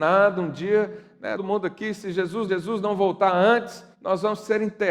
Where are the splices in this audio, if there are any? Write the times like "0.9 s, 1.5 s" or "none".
1.4 s, 2.5 s, 3.9 s